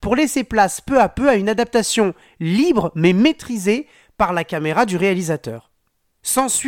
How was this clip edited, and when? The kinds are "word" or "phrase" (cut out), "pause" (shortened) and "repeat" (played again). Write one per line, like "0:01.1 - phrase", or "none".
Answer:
none